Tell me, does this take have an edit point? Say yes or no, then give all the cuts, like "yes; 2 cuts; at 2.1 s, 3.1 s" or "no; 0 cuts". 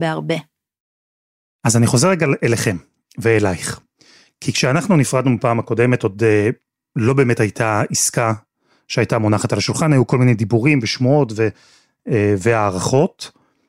no; 0 cuts